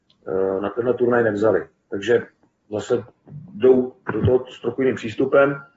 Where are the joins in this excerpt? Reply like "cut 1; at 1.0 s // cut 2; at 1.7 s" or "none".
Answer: cut 1; at 4.0 s